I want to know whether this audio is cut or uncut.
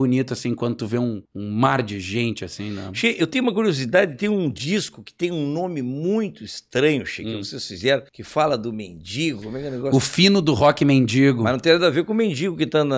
cut